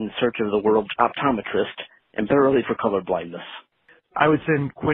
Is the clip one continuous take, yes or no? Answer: no